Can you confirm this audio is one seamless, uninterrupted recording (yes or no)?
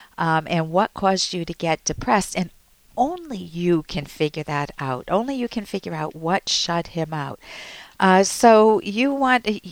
yes